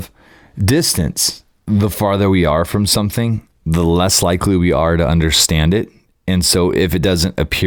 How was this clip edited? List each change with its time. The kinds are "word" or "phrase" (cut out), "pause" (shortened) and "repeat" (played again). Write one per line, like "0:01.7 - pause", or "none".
none